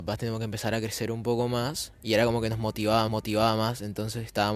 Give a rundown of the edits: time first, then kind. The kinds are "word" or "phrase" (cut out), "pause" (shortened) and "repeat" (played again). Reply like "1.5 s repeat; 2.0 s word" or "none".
3.1 s repeat